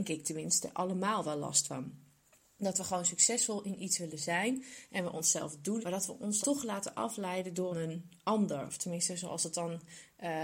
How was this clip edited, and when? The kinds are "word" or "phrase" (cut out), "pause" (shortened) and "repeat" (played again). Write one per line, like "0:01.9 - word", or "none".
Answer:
0:05.8 - word
0:06.4 - word
0:07.7 - phrase